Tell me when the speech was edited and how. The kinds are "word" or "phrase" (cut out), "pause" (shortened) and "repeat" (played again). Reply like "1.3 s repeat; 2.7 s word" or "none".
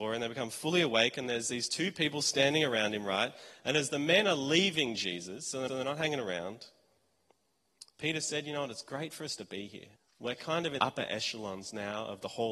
5.7 s repeat; 7.9 s pause; 10.0 s pause; 10.8 s word